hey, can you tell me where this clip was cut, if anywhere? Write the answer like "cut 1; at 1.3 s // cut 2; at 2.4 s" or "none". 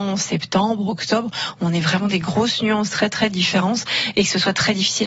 none